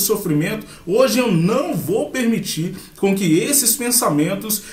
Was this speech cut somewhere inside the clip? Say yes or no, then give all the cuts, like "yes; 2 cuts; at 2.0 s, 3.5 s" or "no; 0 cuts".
no; 0 cuts